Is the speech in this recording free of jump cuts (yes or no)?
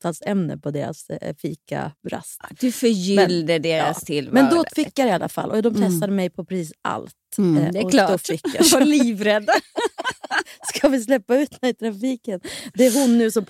no